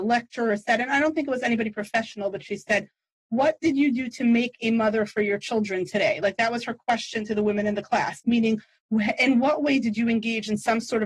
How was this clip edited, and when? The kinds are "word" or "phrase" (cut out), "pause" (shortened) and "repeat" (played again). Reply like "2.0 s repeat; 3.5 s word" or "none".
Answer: none